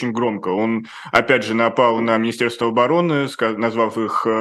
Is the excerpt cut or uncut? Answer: uncut